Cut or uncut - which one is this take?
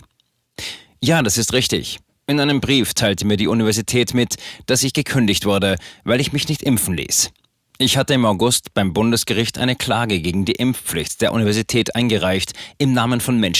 uncut